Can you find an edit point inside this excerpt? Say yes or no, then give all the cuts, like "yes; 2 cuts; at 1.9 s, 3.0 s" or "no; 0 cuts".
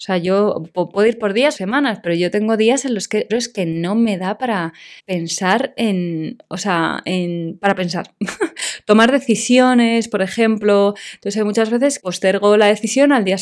yes; 4 cuts; at 1.5 s, 3.3 s, 5.0 s, 12.0 s